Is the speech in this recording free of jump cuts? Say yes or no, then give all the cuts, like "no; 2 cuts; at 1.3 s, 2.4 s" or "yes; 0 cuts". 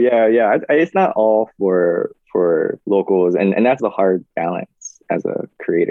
no; 2 cuts; at 2.8 s, 3.8 s